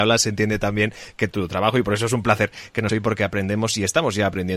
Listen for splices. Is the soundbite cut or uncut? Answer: cut